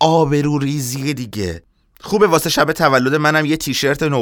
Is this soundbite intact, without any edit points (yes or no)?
yes